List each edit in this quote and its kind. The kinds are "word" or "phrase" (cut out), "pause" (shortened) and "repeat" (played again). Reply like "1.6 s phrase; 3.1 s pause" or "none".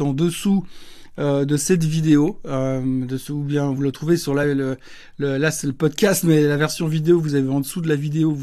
none